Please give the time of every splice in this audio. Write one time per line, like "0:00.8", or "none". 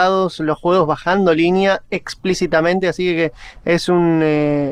none